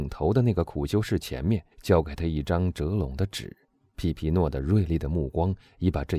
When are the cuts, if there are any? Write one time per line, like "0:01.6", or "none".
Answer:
0:01.7
0:03.8